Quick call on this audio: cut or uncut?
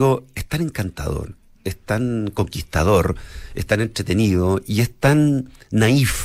uncut